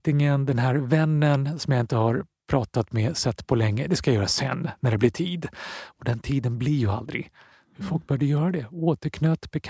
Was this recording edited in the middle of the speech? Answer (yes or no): no